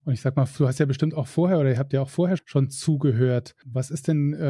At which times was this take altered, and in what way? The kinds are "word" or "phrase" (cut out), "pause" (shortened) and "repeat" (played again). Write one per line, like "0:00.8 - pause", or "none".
0:02.4 - word